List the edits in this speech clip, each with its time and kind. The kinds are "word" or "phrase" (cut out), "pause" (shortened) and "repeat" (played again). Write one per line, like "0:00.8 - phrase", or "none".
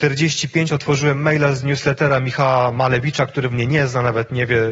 0:03.5 - phrase